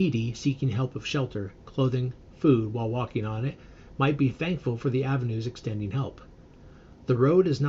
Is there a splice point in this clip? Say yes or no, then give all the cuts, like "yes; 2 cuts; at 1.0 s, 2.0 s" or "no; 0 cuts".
no; 0 cuts